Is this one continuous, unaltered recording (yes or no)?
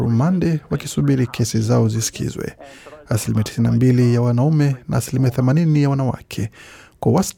yes